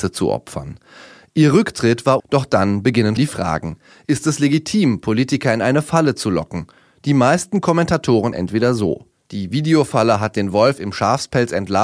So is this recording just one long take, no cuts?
no; 3 cuts; at 2.2 s, 3.2 s, 8.3 s

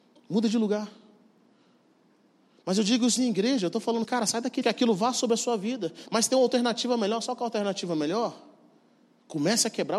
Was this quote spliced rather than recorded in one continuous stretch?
yes; 3 cuts; at 3.2 s, 4.0 s, 4.6 s

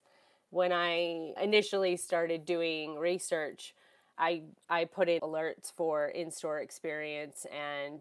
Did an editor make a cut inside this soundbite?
yes; 3 cuts; at 1.4 s, 4.1 s, 5.2 s

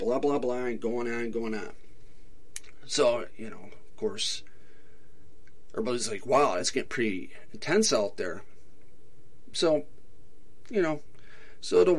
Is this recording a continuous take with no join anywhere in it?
yes; 0 cuts

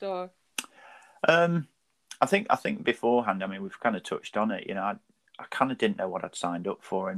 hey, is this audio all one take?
yes; 0 cuts

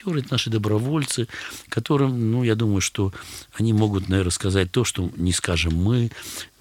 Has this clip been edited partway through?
no; 0 cuts

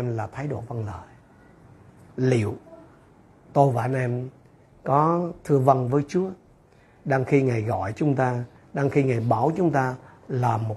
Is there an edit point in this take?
no; 0 cuts

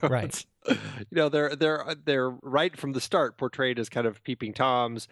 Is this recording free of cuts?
yes; 0 cuts

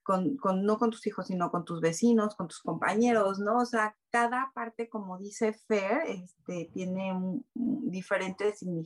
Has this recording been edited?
no; 0 cuts

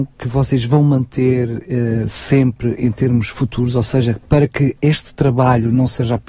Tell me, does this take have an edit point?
no; 0 cuts

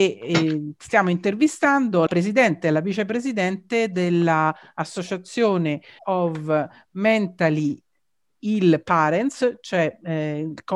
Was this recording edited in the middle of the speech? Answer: yes; 2 cuts; at 2.1 s, 6.0 s

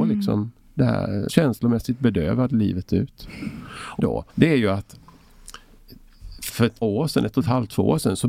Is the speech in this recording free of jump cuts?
no; 5 cuts; at 1.3 s, 4.0 s, 4.3 s, 6.5 s, 6.8 s

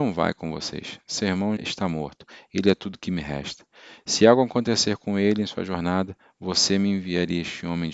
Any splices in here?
yes; 1 cut; at 1.6 s

